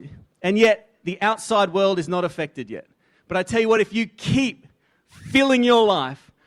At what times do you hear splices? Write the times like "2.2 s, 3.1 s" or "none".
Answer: none